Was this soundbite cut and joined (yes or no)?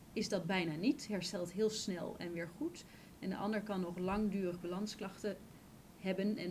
no